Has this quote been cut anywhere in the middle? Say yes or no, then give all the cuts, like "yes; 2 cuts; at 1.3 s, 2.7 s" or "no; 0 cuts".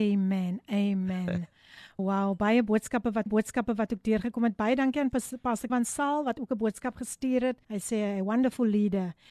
yes; 4 cuts; at 2.0 s, 3.3 s, 5.7 s, 7.6 s